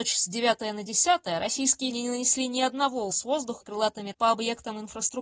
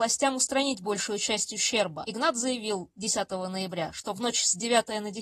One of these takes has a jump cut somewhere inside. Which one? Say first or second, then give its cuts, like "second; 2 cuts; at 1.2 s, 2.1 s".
first; 4 cuts; at 1.9 s, 3.1 s, 3.6 s, 4.1 s